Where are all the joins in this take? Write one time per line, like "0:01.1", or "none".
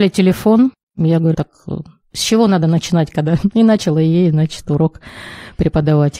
0:01.3